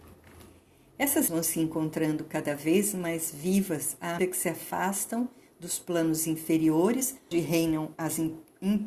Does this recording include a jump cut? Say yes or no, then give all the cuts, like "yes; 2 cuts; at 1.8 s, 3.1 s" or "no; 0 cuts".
yes; 3 cuts; at 1.3 s, 4.2 s, 7.3 s